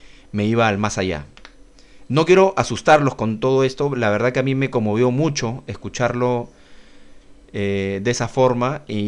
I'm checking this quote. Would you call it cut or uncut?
uncut